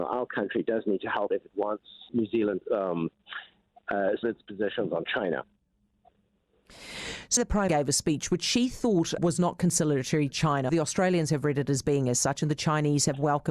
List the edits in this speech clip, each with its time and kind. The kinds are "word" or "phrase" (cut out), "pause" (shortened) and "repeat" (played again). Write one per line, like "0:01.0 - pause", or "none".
0:01.3 - word
0:02.1 - word
0:02.6 - word
0:04.2 - word
0:07.4 - word
0:07.7 - word
0:09.2 - word
0:10.3 - word
0:10.7 - word